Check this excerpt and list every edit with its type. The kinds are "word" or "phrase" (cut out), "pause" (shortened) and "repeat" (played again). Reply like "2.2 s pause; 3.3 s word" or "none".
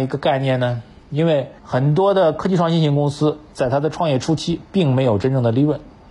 1.6 s pause